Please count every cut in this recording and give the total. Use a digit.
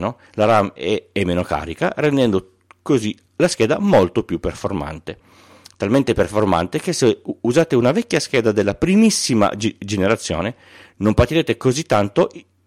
0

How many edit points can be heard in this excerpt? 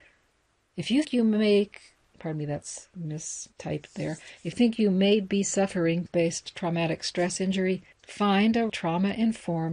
7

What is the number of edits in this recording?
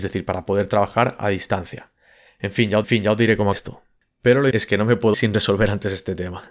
4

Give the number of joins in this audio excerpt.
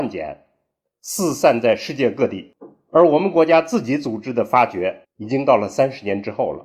1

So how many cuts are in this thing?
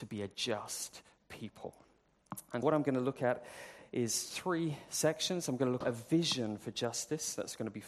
3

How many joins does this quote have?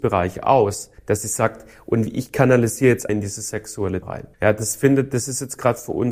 4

